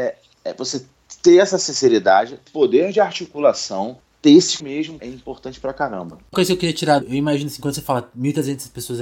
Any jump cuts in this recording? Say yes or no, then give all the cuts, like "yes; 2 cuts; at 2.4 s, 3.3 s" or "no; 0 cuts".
yes; 5 cuts; at 2.5 s, 4.6 s, 5.0 s, 6.3 s, 7.0 s